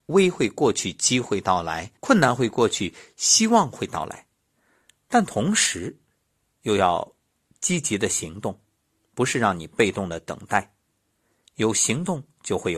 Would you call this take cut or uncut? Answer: cut